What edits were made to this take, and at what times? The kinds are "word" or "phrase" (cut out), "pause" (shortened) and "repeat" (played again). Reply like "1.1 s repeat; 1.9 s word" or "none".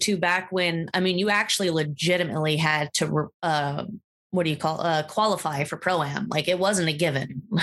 none

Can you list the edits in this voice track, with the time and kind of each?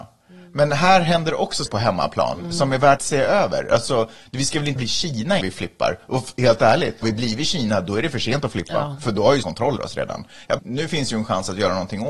1.7 s word; 3.0 s word; 4.8 s word; 5.4 s word; 7.0 s word; 9.4 s word; 9.8 s word; 10.6 s word

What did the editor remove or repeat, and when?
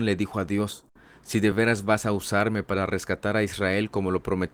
none

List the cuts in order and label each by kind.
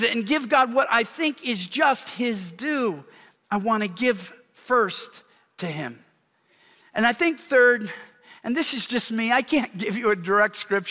none

